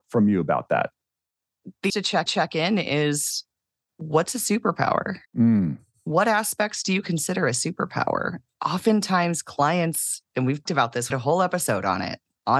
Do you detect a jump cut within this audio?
yes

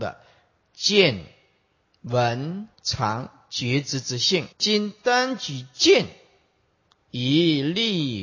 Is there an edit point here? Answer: yes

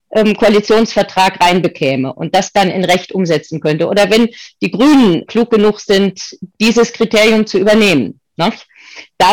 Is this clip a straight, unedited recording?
no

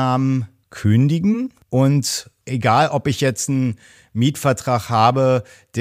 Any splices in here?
no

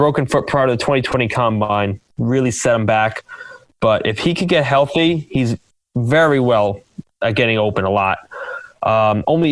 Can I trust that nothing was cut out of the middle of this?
yes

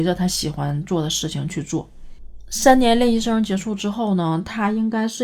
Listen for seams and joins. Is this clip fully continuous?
yes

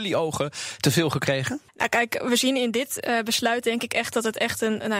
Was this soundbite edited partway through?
yes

